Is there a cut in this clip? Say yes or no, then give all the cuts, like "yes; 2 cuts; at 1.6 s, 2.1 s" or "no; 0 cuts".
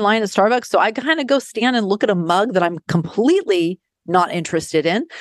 no; 0 cuts